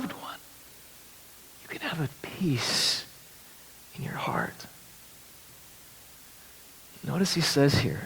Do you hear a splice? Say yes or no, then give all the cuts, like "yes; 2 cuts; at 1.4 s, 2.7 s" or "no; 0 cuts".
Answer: yes; 1 cut; at 2.2 s